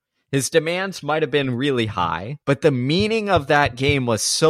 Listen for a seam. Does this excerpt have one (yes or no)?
yes